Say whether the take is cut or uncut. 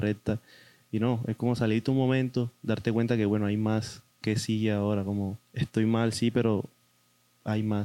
cut